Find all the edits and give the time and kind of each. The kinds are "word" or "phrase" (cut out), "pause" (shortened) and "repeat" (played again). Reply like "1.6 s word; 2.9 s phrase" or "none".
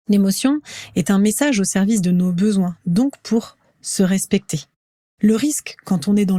none